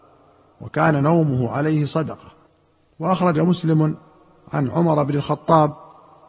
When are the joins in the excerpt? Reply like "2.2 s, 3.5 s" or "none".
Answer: 2.5 s